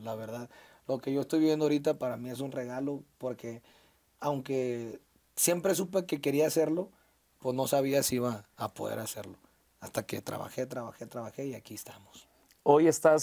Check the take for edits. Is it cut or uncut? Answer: uncut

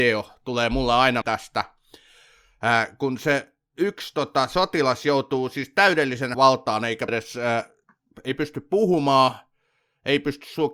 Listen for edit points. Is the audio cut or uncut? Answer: cut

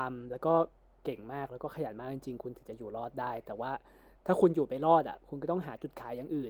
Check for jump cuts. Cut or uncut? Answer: uncut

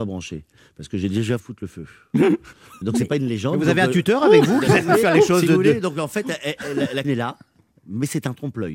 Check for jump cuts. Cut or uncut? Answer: cut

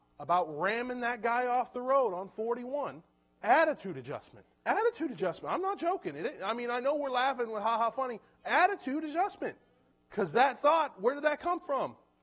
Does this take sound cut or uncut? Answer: cut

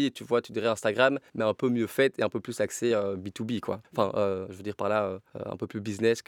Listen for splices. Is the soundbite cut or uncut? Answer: uncut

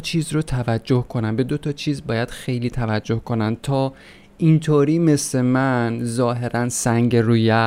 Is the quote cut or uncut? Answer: uncut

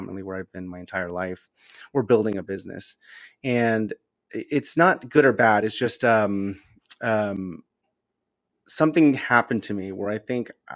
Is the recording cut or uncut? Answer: uncut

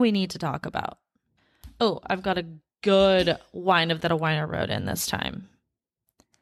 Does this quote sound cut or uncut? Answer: cut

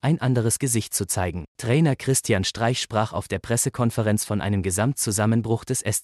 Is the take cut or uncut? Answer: cut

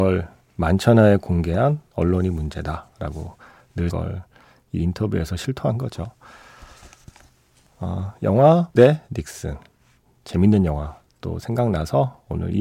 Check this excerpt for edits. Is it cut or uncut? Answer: cut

